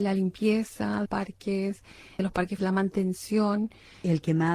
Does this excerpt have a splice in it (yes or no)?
yes